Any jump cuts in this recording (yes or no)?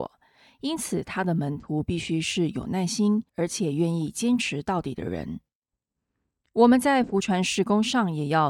yes